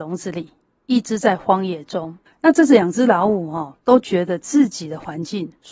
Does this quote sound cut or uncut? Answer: cut